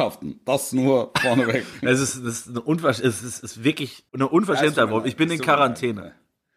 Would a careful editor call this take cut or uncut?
cut